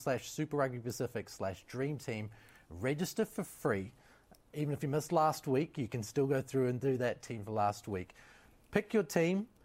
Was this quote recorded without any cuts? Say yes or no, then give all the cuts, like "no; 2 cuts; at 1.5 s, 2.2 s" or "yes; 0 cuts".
yes; 0 cuts